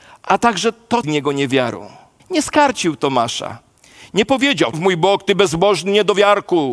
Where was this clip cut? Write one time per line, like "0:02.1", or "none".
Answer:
0:01.0
0:02.2
0:04.7